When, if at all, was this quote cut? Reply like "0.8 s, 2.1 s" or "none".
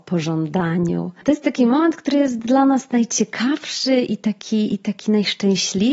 none